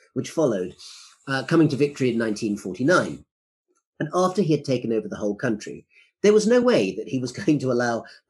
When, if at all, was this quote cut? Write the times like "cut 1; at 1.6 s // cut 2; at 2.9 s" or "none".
none